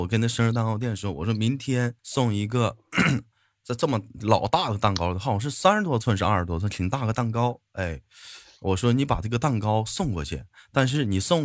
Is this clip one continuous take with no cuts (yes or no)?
no